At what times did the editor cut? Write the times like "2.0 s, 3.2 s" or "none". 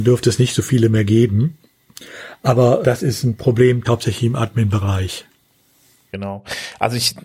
2.8 s, 3.8 s